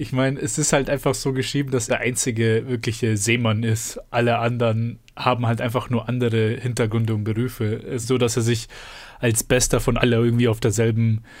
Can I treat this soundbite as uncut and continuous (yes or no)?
no